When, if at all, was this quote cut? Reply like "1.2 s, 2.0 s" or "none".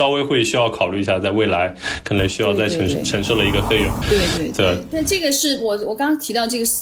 4.0 s